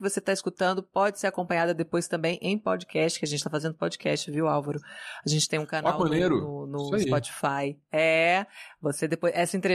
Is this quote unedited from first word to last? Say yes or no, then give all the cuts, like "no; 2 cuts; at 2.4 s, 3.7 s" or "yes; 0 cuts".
yes; 0 cuts